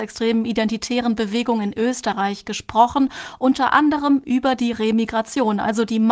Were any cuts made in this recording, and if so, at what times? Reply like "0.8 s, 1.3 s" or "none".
none